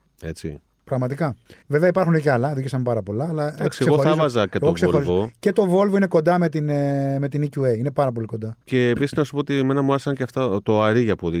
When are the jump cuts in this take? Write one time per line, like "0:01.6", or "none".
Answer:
0:01.6
0:08.6